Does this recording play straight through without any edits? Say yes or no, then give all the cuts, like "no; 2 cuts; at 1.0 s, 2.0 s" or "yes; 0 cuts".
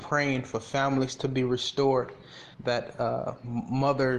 no; 1 cut; at 2.5 s